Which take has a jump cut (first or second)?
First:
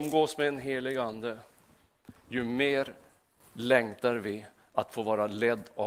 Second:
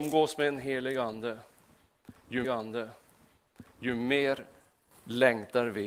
second